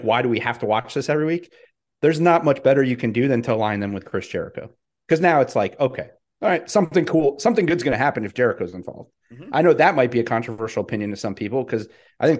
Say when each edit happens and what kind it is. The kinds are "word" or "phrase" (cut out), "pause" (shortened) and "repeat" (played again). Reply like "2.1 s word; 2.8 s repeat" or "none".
none